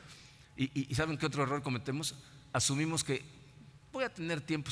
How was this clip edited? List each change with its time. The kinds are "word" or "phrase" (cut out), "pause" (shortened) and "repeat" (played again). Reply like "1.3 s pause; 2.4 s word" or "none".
none

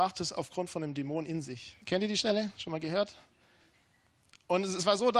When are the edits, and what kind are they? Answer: 1.8 s pause

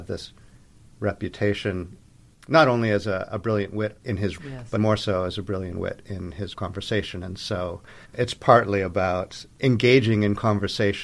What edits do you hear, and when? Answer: 4.0 s pause; 4.4 s word; 4.8 s word; 6.5 s word; 8.0 s pause

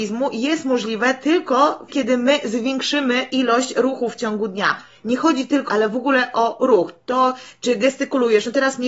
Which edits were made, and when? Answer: 1.9 s word; 5.7 s phrase

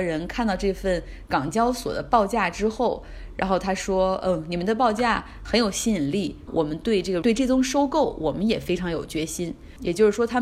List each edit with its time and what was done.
6.5 s phrase; 7.2 s word

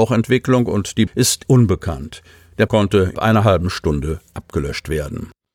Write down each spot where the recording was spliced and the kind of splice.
1.1 s word; 1.4 s word; 2.7 s word; 3.1 s word

